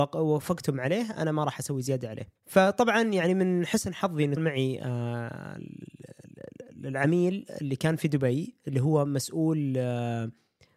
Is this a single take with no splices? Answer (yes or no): no